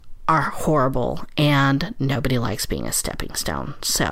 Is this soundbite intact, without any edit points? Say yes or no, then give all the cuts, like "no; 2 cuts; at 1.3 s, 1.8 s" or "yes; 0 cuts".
yes; 0 cuts